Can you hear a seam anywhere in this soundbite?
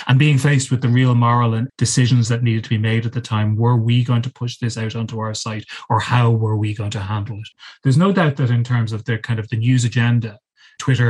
yes; 1 cut; at 1.7 s

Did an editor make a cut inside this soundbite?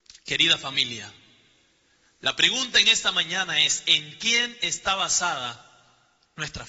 no; 0 cuts

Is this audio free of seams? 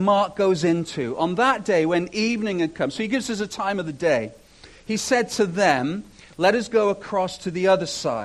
yes; 0 cuts

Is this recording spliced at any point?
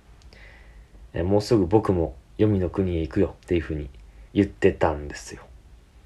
yes; 2 cuts; at 3.4 s, 4.3 s

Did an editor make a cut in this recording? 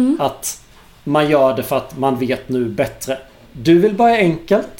no; 0 cuts

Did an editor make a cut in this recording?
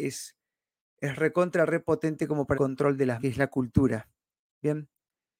yes; 2 cuts; at 2.5 s, 3.2 s

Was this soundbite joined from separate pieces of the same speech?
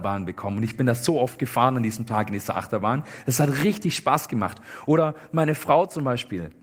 no; 0 cuts

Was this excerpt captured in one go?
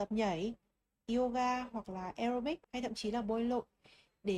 no; 1 cut; at 2.6 s

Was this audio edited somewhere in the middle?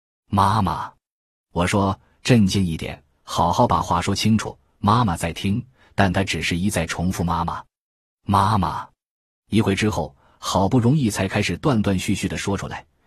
no; 0 cuts

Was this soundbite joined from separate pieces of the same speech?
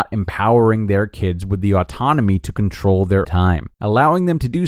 yes; 2 cuts; at 3.2 s, 3.7 s

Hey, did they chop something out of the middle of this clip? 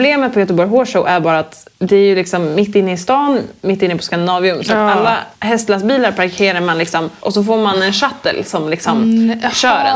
yes; 3 cuts; at 1.7 s, 5.3 s, 7.2 s

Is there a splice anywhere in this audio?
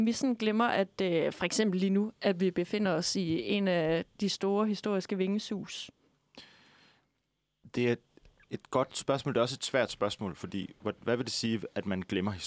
no; 0 cuts

